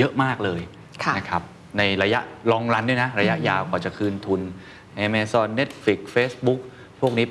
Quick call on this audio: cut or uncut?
uncut